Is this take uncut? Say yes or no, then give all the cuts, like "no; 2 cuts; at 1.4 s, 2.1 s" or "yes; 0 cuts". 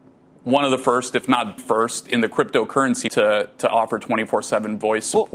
no; 2 cuts; at 1.6 s, 3.1 s